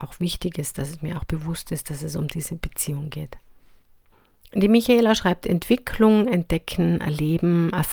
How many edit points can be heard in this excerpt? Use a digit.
1